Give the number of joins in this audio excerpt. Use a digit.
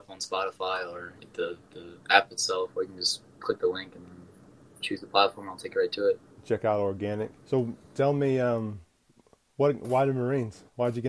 5